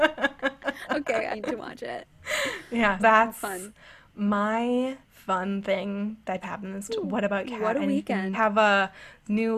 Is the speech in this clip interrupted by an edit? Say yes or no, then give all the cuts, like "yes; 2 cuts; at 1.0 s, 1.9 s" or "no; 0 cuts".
yes; 7 cuts; at 1.3 s, 3.0 s, 5.0 s, 6.4 s, 6.9 s, 7.4 s, 8.3 s